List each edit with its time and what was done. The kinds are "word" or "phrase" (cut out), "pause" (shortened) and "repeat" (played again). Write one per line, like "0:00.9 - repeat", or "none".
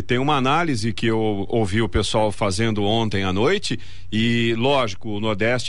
0:00.9 - word